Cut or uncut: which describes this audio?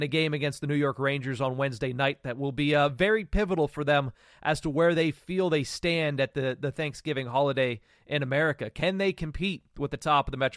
uncut